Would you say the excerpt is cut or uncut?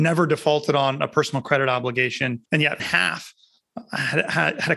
cut